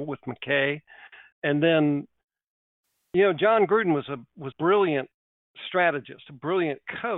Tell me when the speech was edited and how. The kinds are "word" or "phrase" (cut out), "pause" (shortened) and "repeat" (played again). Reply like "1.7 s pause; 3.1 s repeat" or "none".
1.3 s word; 4.5 s word